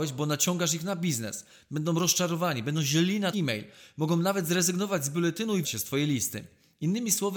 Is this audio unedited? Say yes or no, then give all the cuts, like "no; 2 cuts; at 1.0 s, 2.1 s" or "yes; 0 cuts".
no; 2 cuts; at 3.3 s, 5.6 s